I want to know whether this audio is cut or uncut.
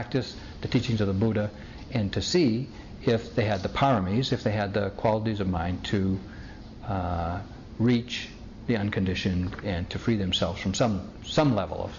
uncut